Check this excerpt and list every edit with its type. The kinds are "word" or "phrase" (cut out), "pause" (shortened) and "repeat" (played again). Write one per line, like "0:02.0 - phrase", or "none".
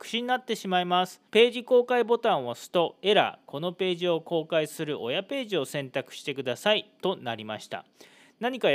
0:01.3 - pause